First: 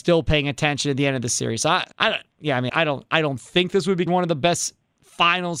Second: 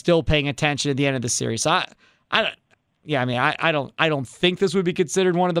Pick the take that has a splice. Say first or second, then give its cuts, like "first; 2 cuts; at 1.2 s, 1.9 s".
first; 4 cuts; at 1.9 s, 2.3 s, 2.7 s, 4.1 s